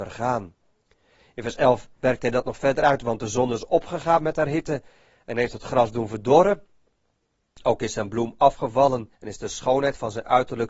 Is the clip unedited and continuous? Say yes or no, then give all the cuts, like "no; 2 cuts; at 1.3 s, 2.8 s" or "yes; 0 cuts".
no; 1 cut; at 9.2 s